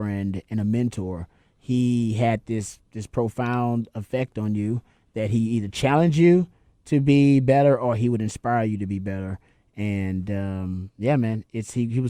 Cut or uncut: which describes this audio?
uncut